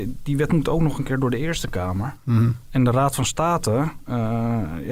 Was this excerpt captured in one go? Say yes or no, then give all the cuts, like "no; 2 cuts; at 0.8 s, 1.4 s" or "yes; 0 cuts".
yes; 0 cuts